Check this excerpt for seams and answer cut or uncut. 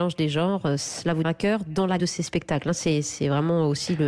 cut